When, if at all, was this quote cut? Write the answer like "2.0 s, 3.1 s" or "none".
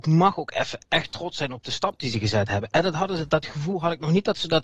none